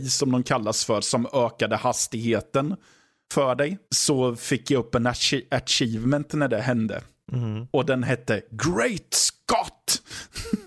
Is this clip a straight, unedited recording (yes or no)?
yes